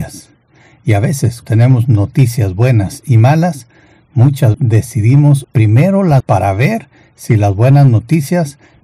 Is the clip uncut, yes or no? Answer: no